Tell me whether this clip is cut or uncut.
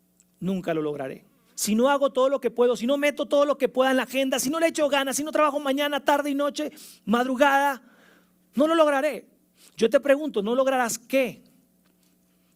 uncut